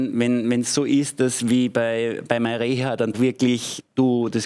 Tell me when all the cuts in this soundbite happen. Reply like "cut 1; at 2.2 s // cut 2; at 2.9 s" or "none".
cut 1; at 3.1 s